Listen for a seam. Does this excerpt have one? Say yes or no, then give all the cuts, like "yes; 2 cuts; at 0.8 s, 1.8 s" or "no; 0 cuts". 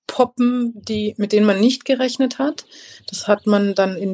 no; 0 cuts